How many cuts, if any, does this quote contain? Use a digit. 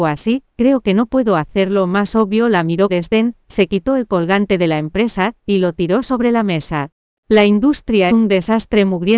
2